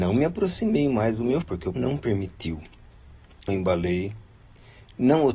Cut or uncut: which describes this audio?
cut